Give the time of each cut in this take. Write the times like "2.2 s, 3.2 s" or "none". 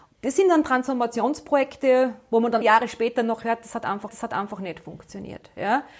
2.6 s, 4.1 s